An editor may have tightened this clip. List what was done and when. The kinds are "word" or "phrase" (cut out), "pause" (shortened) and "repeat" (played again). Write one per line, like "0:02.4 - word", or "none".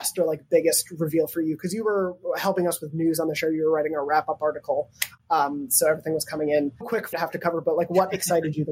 0:06.8 - word
0:07.1 - word